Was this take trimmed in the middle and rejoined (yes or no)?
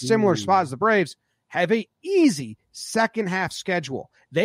no